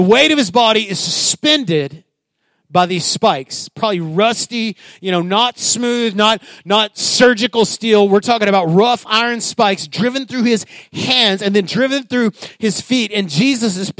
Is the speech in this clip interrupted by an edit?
no; 0 cuts

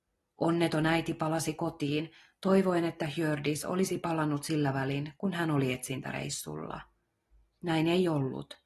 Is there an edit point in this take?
no; 0 cuts

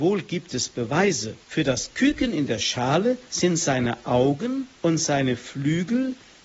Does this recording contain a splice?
yes; 3 cuts; at 1.4 s, 3.3 s, 4.7 s

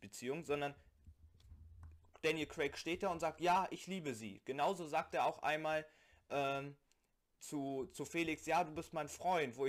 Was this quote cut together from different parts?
no; 0 cuts

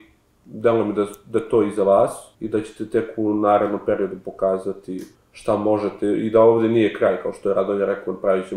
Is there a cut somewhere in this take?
yes; 2 cuts; at 2.3 s, 5.1 s

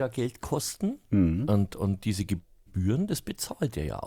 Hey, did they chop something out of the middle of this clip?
no; 0 cuts

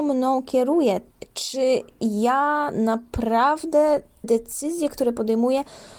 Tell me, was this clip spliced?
yes; 1 cut; at 4.2 s

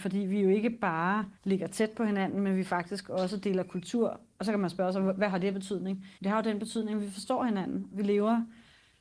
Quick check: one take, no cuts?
no; 2 cuts; at 1.3 s, 6.1 s

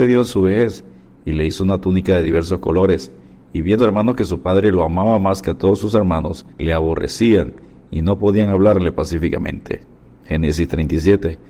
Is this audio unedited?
no; 2 cuts; at 3.8 s, 6.5 s

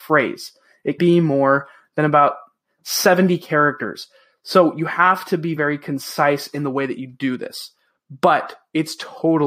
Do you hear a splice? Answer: yes; 2 cuts; at 1.0 s, 5.6 s

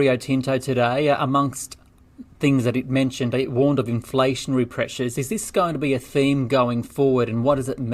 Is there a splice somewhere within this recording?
no; 0 cuts

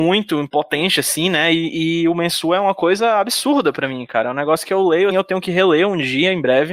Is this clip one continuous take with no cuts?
no; 1 cut; at 5.1 s

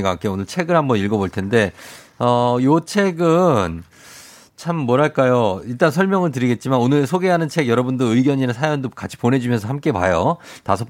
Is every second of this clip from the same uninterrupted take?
yes; 0 cuts

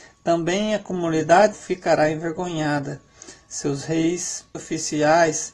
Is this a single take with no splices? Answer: no; 2 cuts; at 1.5 s, 4.5 s

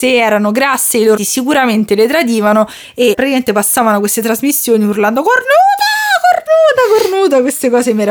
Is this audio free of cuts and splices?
no; 2 cuts; at 1.2 s, 3.1 s

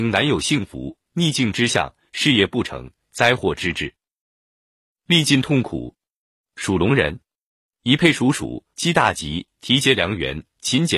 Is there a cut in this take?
yes; 1 cut; at 8.7 s

